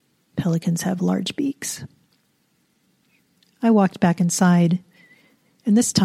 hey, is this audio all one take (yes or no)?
yes